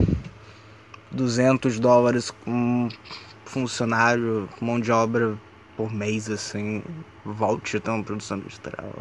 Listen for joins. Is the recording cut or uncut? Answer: uncut